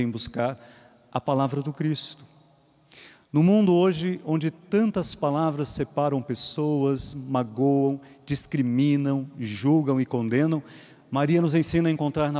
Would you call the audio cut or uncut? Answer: uncut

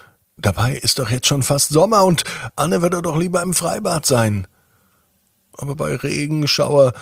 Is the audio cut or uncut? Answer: uncut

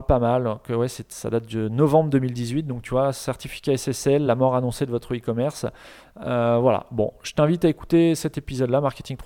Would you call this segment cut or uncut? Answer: uncut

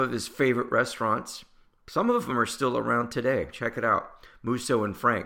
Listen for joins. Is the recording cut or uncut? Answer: uncut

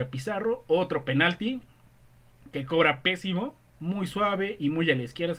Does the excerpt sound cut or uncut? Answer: cut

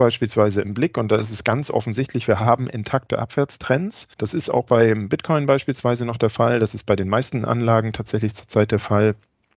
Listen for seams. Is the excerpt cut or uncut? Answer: cut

